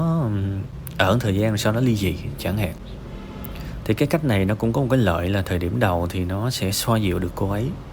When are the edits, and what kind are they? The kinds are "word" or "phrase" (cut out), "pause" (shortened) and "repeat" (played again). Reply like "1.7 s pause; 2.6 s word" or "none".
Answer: none